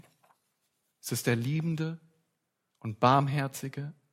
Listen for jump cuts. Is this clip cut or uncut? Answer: uncut